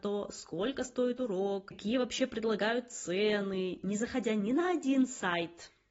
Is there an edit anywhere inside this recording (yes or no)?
no